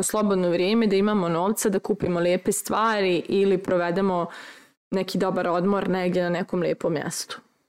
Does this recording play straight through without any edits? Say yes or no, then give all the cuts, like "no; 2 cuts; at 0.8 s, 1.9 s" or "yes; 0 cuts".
yes; 0 cuts